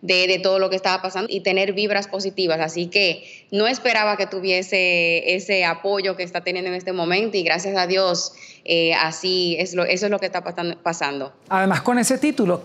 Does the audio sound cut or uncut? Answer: cut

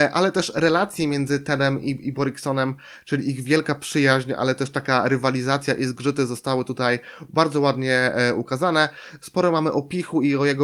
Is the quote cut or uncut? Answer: uncut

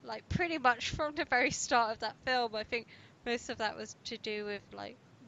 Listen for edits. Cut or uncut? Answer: uncut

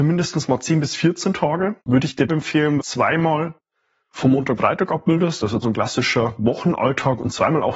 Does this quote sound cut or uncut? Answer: cut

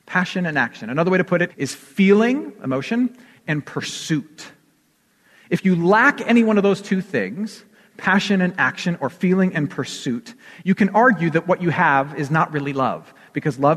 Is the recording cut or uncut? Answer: cut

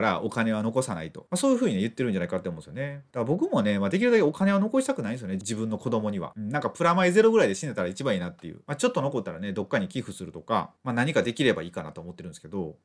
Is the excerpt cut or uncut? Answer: uncut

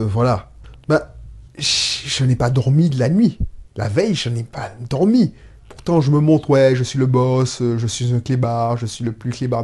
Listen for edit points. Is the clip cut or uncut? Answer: cut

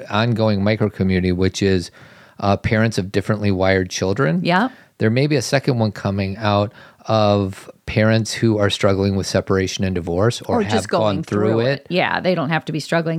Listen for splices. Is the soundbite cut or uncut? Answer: uncut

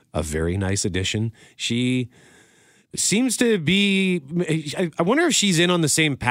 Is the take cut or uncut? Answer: uncut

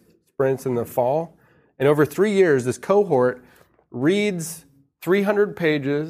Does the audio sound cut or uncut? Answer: uncut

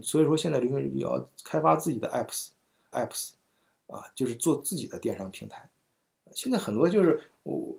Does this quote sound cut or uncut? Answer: cut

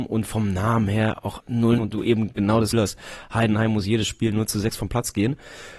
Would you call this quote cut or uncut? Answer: cut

